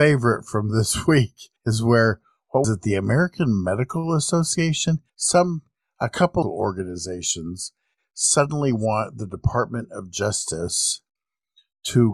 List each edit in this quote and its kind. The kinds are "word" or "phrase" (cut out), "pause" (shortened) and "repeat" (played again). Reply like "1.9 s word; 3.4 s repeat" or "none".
1.6 s pause; 2.6 s word; 5.1 s pause; 6.4 s phrase